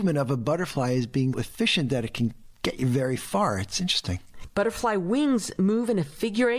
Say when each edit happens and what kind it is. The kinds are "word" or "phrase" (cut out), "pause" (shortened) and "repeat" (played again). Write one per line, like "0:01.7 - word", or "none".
0:01.3 - word